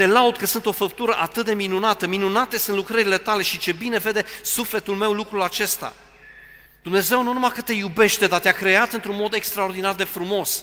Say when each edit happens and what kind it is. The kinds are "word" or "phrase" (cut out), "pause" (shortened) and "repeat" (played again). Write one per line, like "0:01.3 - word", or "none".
0:06.7 - pause